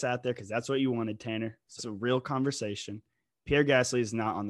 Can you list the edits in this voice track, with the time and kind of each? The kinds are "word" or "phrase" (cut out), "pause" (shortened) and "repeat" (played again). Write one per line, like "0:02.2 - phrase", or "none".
0:01.8 - phrase